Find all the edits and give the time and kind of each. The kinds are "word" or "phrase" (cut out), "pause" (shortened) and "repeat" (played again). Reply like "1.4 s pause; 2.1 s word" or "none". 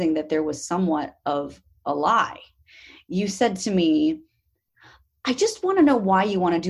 none